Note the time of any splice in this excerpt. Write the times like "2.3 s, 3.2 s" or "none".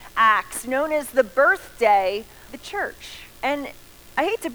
2.5 s, 3.3 s